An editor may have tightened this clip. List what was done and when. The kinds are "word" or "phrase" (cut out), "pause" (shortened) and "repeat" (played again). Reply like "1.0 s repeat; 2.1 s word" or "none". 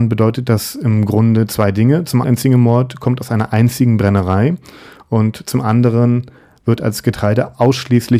2.2 s word